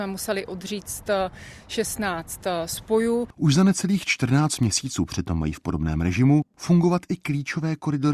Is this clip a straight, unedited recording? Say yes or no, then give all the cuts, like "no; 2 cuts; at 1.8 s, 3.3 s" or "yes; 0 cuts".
yes; 0 cuts